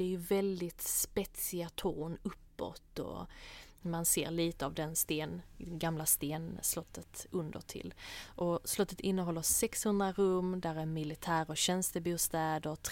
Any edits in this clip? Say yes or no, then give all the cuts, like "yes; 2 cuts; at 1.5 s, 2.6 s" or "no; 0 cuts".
no; 0 cuts